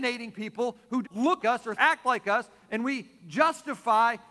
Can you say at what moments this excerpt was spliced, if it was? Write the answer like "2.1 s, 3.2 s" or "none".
1.0 s, 1.4 s, 1.8 s

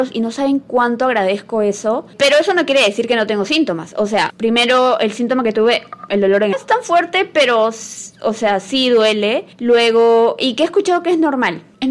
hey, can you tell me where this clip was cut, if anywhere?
6.5 s, 9.5 s

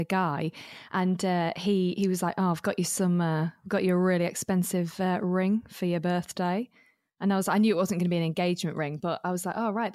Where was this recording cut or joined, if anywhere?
none

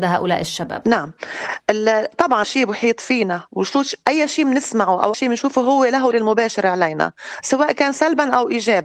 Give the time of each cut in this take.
2.4 s, 5.1 s, 6.1 s

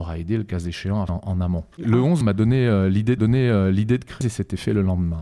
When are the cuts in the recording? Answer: 1.1 s, 1.7 s, 2.2 s, 3.2 s, 4.2 s

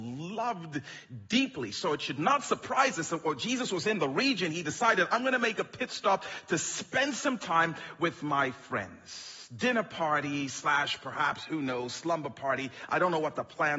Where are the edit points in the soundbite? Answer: none

